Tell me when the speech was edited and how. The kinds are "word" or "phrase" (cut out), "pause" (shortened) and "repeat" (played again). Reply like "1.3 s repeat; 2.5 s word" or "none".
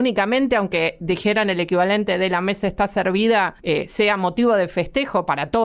3.6 s pause